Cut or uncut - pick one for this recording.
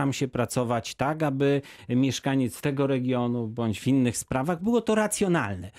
uncut